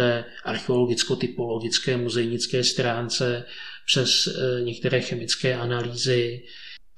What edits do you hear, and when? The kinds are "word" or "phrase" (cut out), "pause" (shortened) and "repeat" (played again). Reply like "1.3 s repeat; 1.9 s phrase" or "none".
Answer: none

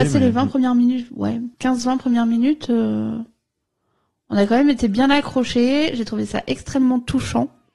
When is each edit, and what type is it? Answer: 1.5 s pause

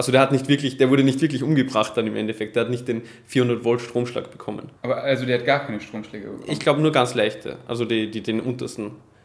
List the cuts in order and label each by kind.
4.8 s pause

